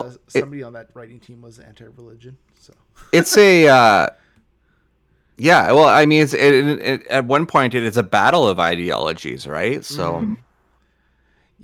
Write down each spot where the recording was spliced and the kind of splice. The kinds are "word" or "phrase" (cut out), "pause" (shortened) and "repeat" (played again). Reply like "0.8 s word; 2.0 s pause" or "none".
none